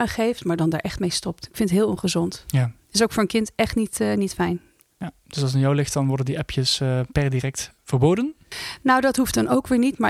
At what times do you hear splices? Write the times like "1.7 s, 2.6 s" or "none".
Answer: 7.8 s